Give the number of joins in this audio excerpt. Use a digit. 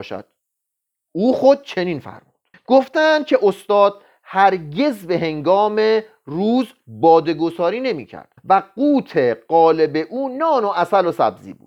2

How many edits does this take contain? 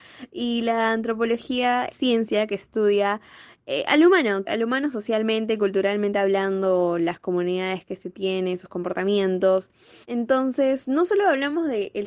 3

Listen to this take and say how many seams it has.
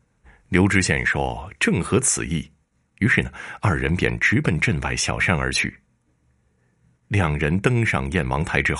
0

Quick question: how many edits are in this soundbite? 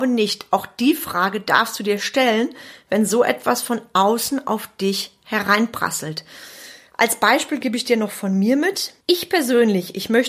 1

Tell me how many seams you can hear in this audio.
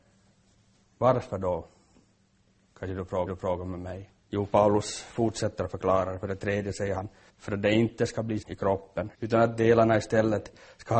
5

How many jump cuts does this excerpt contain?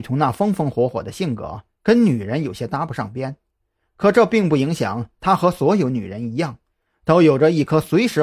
0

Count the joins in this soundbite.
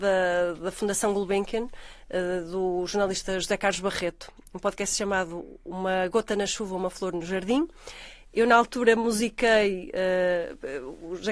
0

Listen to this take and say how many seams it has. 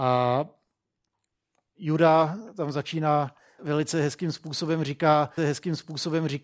2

